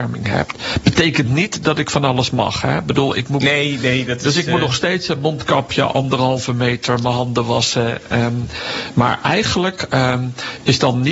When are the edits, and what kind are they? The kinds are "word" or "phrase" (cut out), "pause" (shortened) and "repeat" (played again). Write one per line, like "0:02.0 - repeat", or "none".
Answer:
none